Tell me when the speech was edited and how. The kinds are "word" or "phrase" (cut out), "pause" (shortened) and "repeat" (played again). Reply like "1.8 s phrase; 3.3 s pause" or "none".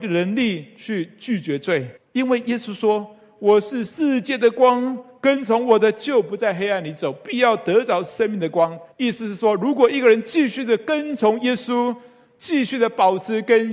2.0 s pause; 8.9 s pause

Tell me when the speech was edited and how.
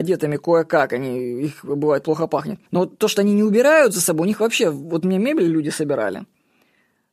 2.7 s pause

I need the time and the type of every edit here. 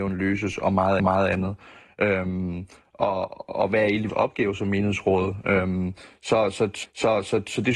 1.0 s repeat; 4.1 s word; 6.8 s repeat

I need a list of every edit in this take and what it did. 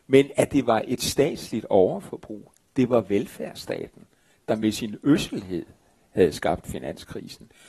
none

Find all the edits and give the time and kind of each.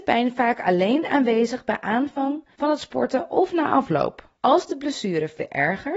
2.5 s pause; 4.4 s pause

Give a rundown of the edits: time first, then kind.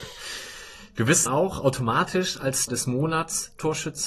1.3 s word; 2.7 s word

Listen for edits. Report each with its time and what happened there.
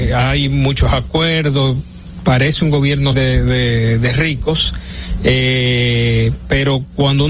3.1 s word

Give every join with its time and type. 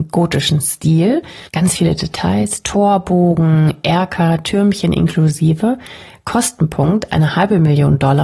1.5 s pause

